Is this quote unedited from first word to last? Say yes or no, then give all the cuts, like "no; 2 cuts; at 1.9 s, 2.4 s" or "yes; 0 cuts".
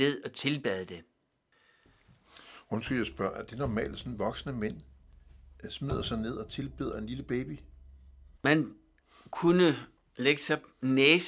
no; 2 cuts; at 8.4 s, 10.0 s